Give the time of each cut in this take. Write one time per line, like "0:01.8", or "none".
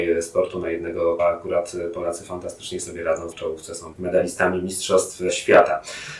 0:01.2
0:03.3
0:03.9